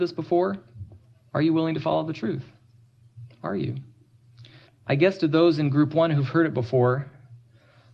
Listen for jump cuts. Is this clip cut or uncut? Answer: cut